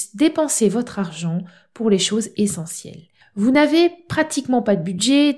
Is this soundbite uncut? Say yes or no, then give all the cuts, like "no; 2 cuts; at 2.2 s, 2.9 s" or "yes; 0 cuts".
yes; 0 cuts